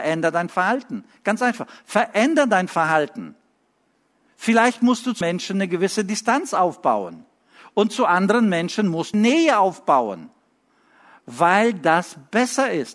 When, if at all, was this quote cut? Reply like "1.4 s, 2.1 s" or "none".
5.2 s, 9.1 s